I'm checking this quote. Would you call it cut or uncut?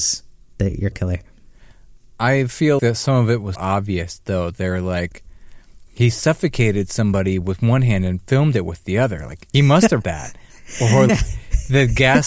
cut